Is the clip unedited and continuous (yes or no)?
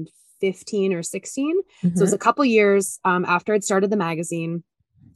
yes